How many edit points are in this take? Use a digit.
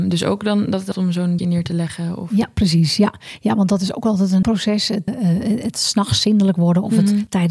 4